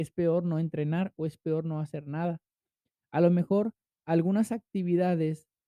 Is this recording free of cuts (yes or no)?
yes